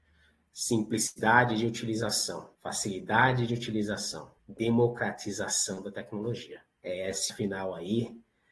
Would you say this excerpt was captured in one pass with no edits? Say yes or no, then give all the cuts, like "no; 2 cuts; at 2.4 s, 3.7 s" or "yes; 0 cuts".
no; 4 cuts; at 2.5 s, 4.4 s, 6.8 s, 7.3 s